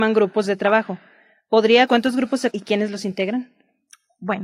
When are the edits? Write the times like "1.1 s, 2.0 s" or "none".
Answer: 1.9 s, 2.5 s

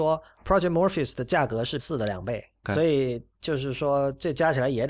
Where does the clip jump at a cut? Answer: 1.8 s, 2.6 s

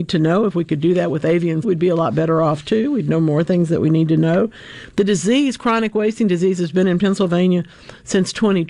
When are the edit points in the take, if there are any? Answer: 1.6 s

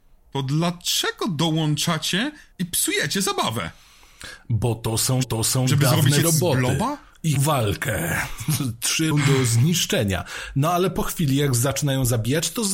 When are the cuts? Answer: 2.5 s, 5.2 s, 6.2 s, 7.4 s, 9.1 s

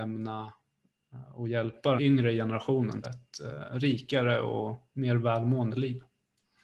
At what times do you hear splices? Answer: 2.0 s, 3.0 s

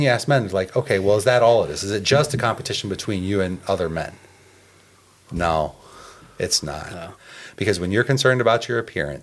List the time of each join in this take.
none

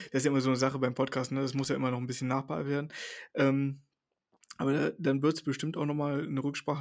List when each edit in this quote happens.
none

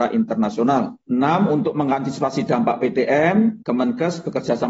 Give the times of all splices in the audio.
none

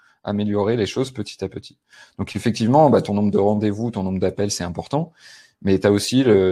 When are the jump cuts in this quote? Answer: none

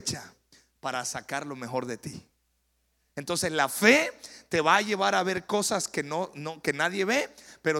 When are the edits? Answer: none

